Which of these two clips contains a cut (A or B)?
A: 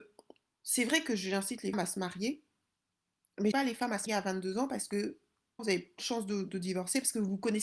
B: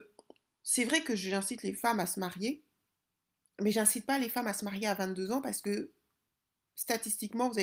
A